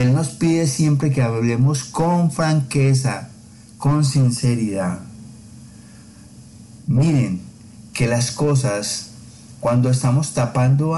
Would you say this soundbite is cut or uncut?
uncut